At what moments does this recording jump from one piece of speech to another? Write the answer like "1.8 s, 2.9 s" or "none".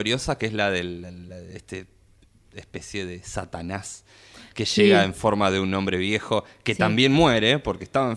none